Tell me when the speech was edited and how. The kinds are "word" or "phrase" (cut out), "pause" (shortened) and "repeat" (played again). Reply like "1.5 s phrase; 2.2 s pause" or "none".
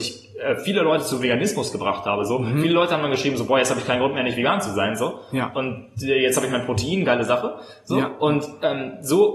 none